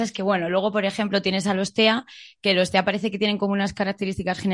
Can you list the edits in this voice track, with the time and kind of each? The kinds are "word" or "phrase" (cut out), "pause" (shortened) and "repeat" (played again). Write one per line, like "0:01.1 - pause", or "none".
none